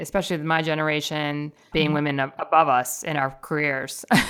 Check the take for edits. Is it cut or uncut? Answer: cut